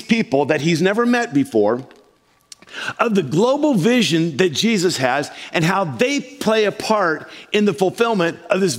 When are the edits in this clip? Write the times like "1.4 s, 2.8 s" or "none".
none